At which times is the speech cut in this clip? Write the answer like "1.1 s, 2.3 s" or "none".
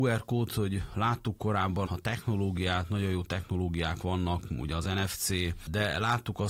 1.9 s